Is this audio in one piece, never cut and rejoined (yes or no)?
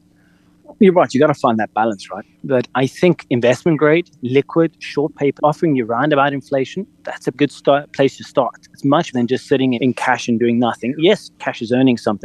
no